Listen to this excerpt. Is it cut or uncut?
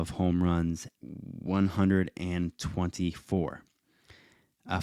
cut